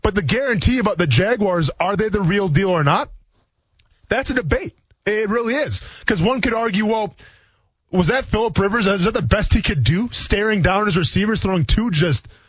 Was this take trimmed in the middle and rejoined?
no; 0 cuts

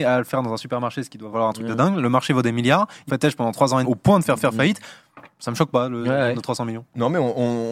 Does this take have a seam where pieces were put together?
yes; 5 cuts; at 1.3 s, 3.1 s, 3.8 s, 4.4 s, 5.3 s

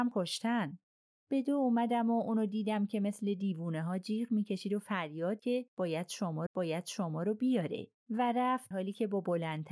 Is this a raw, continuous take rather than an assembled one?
no; 4 cuts; at 5.4 s, 6.5 s, 8.0 s, 8.7 s

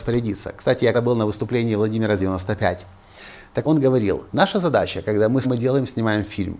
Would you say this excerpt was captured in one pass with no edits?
no; 5 cuts; at 0.9 s, 2.2 s, 3.6 s, 4.3 s, 5.4 s

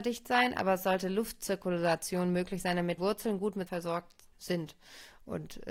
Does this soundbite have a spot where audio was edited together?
yes; 3 cuts; at 3.0 s, 3.7 s, 4.3 s

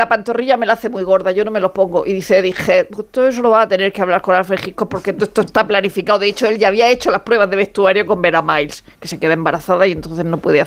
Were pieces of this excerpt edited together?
no; 0 cuts

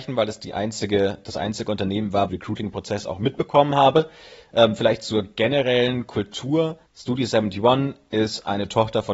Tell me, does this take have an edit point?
yes; 2 cuts; at 2.3 s, 6.9 s

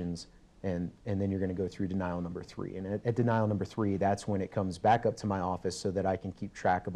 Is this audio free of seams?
yes; 0 cuts

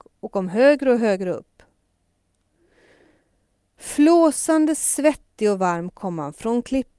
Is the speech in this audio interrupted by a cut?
no; 0 cuts

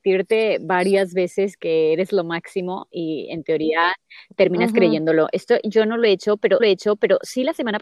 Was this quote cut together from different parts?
yes; 2 cuts; at 1.6 s, 6.6 s

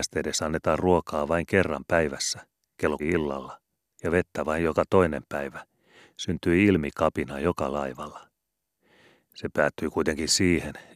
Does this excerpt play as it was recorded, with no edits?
no; 1 cut; at 3.0 s

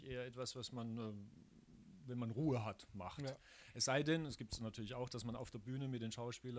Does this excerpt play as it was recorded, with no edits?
yes; 0 cuts

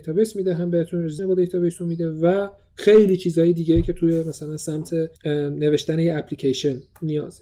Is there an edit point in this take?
yes; 2 cuts; at 1.2 s, 5.2 s

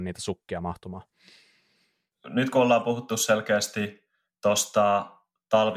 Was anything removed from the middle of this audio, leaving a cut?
no; 0 cuts

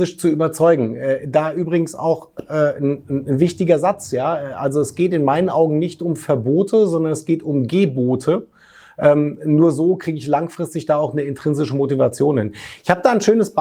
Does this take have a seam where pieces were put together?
no; 0 cuts

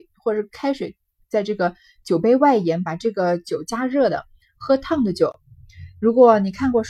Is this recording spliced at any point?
no; 0 cuts

